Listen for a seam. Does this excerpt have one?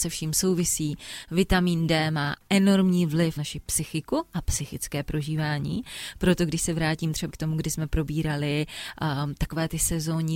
yes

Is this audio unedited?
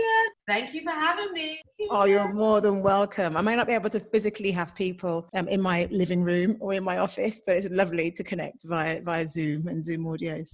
yes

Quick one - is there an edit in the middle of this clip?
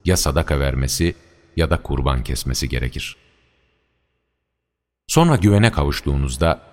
no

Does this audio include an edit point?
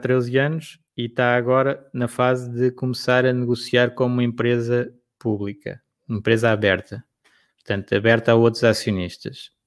no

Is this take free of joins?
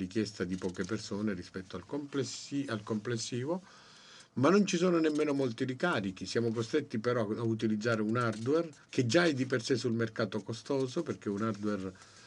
no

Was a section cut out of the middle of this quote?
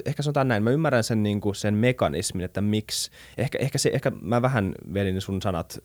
no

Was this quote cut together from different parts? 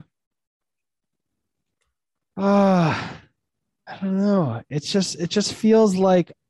no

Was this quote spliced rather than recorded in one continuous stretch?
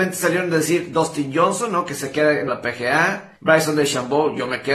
yes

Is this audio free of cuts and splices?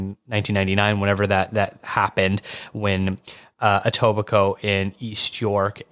yes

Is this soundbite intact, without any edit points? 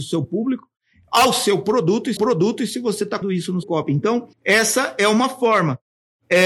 no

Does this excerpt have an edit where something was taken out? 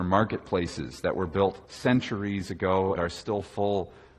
yes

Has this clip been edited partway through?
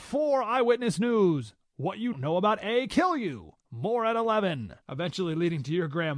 yes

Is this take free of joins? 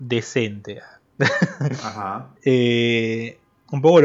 no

